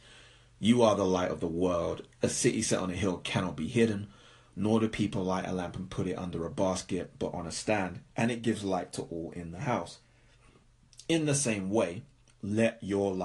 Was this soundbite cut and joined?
no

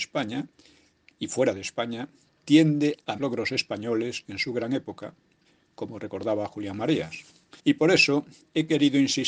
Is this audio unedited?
no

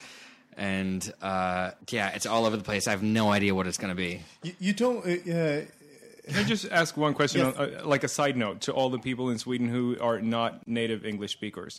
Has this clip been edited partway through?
yes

